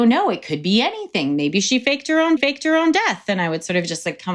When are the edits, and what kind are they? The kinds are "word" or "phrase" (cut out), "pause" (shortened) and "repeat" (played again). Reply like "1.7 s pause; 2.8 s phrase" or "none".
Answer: 2.4 s repeat